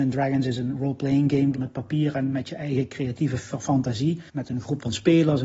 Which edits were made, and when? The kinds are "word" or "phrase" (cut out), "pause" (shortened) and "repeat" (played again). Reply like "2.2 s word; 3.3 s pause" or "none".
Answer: 1.5 s phrase; 4.3 s pause